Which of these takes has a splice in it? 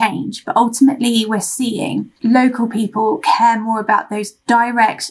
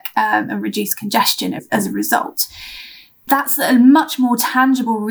first; 1 cut; at 2.2 s

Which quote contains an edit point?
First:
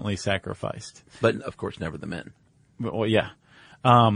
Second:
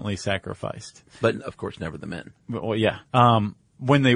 second; 2 cuts; at 2.4 s, 3.1 s

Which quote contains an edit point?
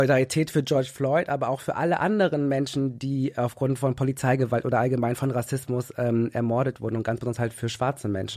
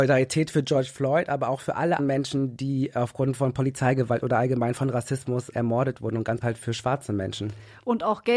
second; 3 cuts; at 2.0 s, 5.5 s, 6.4 s

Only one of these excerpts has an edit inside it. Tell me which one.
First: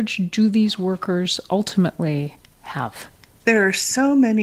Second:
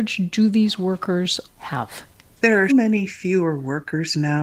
second; 2 cuts; at 1.5 s, 2.7 s

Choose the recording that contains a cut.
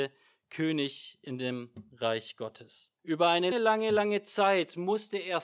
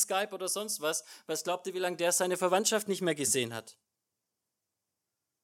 first; 2 cuts; at 3.0 s, 3.5 s

